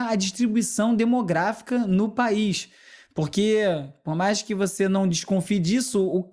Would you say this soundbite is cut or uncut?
uncut